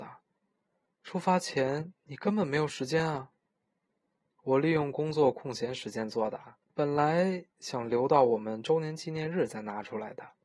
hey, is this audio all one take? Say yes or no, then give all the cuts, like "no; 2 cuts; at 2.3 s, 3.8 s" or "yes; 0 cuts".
no; 1 cut; at 6.6 s